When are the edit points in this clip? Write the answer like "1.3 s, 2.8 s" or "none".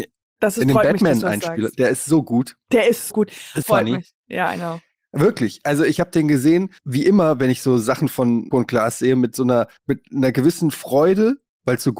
3.1 s, 3.6 s, 5.9 s, 6.8 s, 8.5 s, 9.8 s